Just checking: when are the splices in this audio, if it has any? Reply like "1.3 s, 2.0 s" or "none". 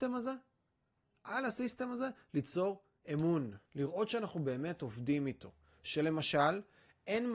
3.7 s